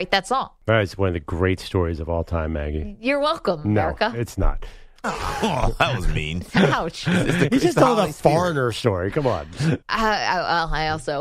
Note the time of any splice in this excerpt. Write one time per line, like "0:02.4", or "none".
0:09.8